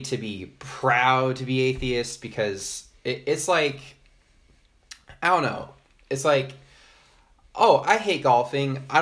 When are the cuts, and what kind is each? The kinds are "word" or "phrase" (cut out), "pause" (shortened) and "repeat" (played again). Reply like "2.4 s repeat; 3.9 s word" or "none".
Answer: none